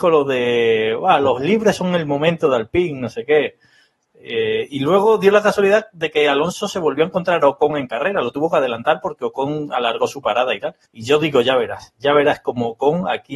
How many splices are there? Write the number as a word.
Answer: one